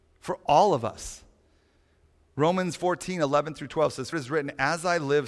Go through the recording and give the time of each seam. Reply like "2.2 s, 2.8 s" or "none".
4.1 s